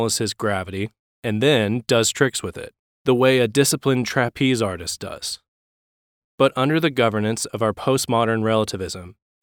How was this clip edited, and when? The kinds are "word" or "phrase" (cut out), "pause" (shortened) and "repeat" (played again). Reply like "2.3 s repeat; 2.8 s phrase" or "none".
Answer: none